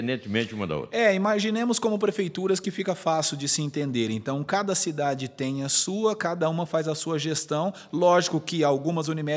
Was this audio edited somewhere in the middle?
no; 0 cuts

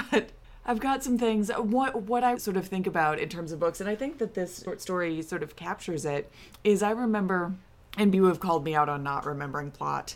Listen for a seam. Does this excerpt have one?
yes; 2 cuts; at 2.3 s, 8.1 s

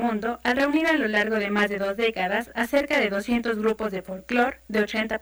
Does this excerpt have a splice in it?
no; 0 cuts

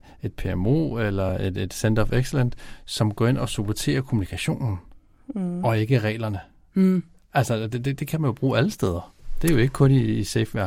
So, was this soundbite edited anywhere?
no; 0 cuts

